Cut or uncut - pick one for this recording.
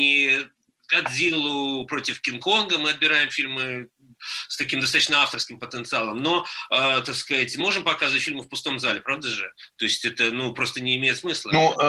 cut